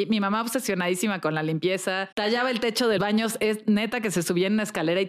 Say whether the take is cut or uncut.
cut